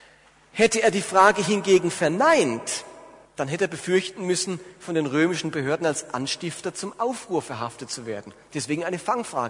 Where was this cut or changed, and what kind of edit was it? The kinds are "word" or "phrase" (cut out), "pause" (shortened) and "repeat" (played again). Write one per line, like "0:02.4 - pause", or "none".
0:03.2 - pause